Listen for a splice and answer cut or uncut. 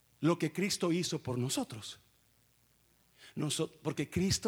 uncut